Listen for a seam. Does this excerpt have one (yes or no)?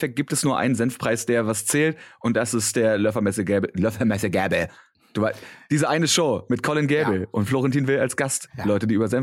no